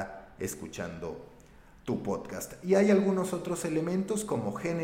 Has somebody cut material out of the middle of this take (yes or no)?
no